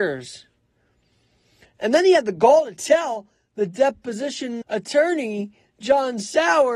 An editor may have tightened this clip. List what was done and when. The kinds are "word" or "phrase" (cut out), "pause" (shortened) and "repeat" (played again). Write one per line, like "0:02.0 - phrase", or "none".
0:04.6 - word